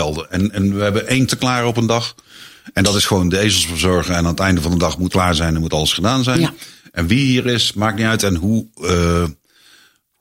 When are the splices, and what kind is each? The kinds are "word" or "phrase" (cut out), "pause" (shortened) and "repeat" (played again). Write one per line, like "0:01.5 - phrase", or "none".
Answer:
0:01.3 - word
0:05.1 - word